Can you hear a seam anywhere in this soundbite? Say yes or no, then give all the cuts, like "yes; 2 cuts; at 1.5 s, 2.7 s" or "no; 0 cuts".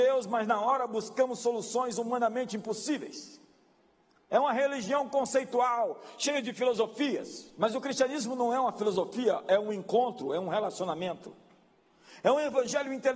no; 0 cuts